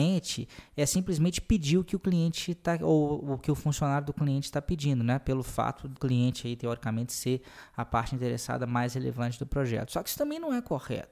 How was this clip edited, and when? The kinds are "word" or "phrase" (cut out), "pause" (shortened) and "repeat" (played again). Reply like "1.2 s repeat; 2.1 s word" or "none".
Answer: 6.0 s word